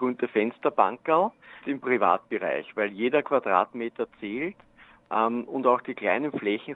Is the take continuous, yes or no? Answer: no